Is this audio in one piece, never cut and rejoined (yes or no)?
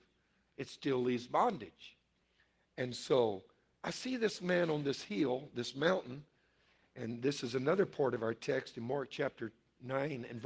yes